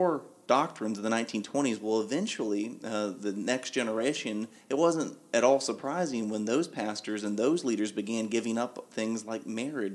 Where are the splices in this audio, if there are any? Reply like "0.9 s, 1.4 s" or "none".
none